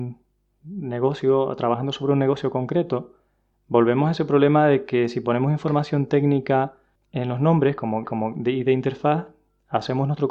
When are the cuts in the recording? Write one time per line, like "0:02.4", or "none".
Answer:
0:08.0